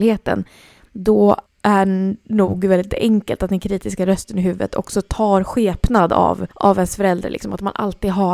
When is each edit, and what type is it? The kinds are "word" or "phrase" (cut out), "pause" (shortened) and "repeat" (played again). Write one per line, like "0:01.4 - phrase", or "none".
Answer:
0:01.5 - pause
0:06.5 - pause